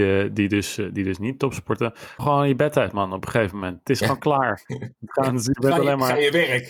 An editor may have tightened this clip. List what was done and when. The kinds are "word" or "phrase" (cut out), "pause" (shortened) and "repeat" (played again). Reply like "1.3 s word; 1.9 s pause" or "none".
2.2 s word